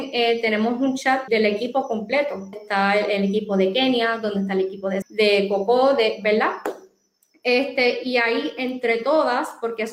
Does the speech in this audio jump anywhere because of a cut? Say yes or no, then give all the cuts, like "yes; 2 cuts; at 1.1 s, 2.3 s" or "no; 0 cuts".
yes; 3 cuts; at 1.3 s, 2.5 s, 5.0 s